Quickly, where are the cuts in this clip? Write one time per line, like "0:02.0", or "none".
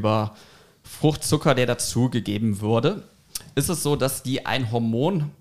none